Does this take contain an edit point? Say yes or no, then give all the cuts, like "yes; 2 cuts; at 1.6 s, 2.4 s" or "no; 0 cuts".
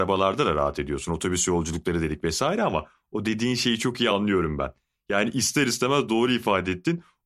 no; 0 cuts